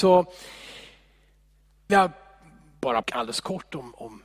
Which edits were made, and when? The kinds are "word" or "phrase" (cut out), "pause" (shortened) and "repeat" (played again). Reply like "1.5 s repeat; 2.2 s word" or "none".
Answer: 1.9 s word; 3.0 s word